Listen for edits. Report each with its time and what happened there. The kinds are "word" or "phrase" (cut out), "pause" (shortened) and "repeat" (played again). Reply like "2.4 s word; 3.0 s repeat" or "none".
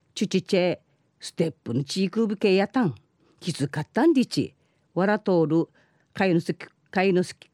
none